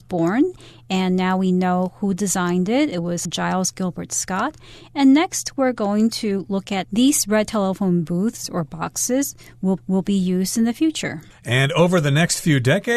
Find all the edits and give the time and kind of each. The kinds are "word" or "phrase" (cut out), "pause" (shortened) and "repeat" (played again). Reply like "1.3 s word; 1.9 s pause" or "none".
3.3 s phrase; 6.8 s word; 9.8 s repeat